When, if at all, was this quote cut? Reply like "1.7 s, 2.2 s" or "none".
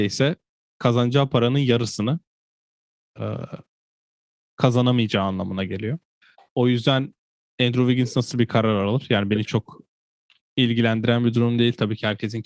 none